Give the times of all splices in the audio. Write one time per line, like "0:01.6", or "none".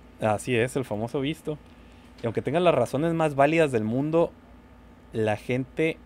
none